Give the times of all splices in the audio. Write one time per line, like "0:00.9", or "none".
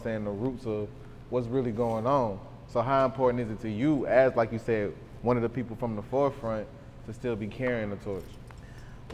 none